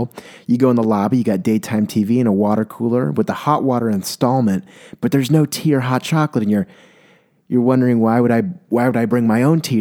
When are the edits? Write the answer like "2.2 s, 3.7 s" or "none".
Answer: none